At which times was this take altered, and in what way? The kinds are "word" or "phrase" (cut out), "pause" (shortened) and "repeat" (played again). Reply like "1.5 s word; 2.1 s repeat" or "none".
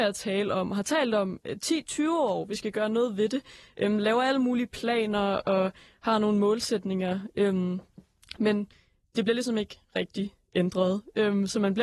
none